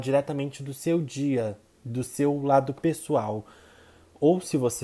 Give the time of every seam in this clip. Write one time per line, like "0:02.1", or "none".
none